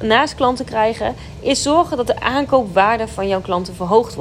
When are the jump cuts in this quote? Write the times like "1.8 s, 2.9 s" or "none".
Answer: none